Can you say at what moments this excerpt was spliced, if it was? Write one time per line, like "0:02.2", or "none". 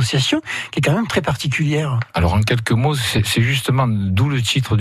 none